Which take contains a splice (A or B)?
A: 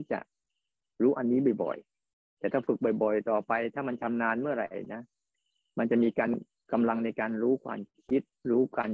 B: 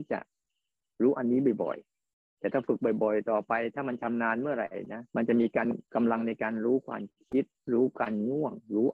B